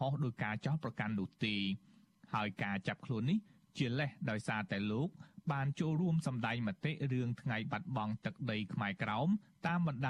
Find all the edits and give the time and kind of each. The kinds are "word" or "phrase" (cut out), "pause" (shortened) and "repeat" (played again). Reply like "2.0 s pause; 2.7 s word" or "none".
none